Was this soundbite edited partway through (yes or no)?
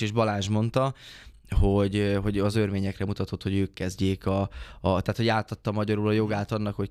no